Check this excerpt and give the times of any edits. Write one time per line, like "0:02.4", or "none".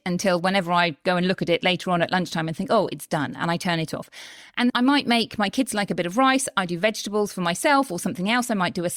0:04.7

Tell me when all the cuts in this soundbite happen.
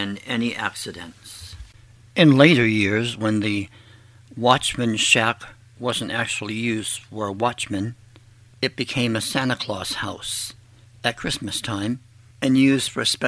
none

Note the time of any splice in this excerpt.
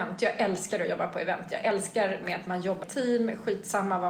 0:02.2
0:02.8

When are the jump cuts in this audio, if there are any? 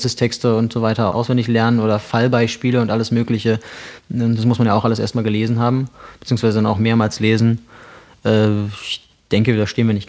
0:01.1

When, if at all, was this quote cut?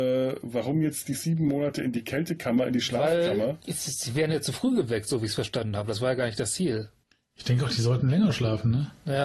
0:07.0

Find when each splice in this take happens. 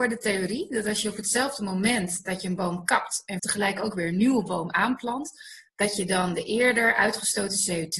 0:03.4

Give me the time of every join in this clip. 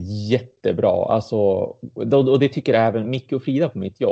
none

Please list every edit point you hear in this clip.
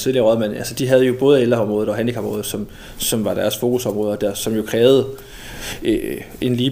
none

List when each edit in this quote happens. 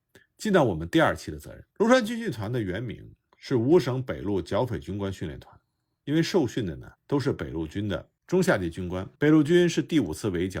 0:01.7
0:07.0
0:09.2

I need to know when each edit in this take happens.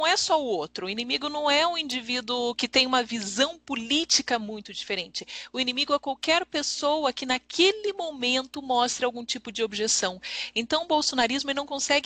none

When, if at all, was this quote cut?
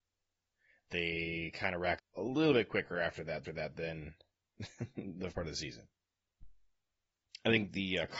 0:02.0
0:03.4
0:05.3

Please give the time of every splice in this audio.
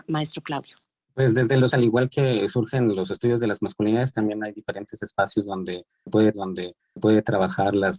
0:01.7
0:06.3

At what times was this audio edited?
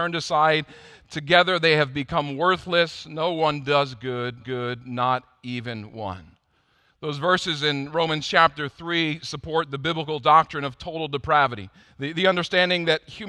0:04.4

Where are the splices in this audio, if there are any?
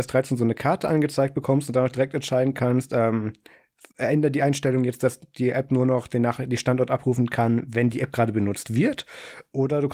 none

